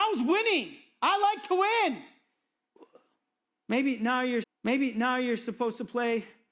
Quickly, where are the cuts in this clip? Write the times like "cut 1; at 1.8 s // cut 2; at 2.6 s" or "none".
cut 1; at 4.4 s